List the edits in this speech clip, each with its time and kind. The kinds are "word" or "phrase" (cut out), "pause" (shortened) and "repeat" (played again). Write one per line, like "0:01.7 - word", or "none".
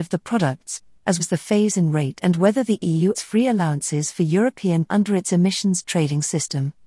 0:01.2 - word
0:03.1 - word
0:04.8 - word